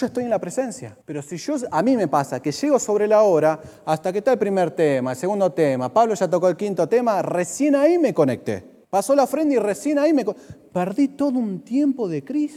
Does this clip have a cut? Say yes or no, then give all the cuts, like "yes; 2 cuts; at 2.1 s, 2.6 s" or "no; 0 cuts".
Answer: yes; 2 cuts; at 1.0 s, 8.8 s